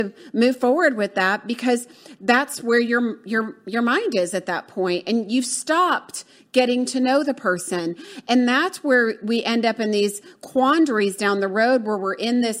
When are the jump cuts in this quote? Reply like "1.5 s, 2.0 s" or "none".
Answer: none